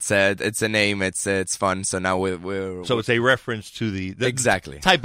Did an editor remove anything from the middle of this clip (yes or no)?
no